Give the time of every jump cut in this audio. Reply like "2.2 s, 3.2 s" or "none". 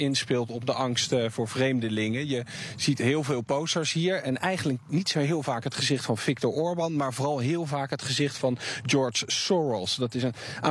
none